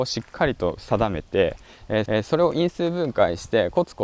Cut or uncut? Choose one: cut